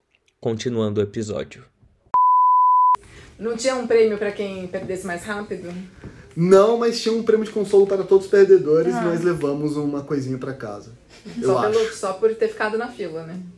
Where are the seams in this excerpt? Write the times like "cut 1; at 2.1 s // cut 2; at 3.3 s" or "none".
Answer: none